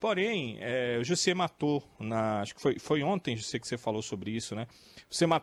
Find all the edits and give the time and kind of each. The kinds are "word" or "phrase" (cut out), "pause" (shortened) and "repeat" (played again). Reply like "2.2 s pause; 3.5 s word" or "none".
none